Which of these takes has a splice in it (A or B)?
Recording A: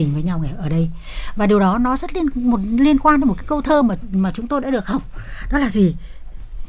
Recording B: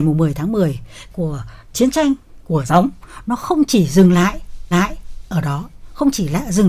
B